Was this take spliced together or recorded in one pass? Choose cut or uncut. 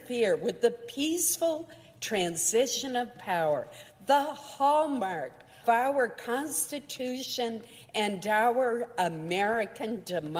cut